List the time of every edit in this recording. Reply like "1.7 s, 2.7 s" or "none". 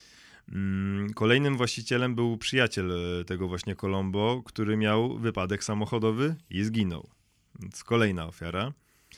none